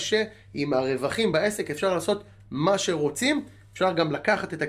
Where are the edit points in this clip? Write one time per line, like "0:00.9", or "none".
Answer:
none